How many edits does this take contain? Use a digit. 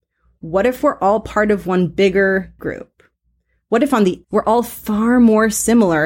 2